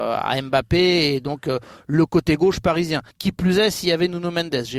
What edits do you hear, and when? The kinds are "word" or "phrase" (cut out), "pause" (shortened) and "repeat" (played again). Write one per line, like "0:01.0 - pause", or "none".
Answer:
0:03.1 - pause